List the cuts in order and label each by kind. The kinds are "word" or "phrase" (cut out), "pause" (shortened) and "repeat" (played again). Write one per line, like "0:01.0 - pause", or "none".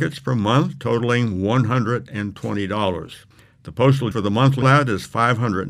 0:04.1 - word
0:04.6 - word